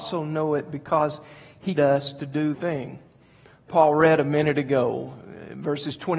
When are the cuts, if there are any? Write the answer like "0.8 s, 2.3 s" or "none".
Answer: 1.7 s, 2.5 s, 3.7 s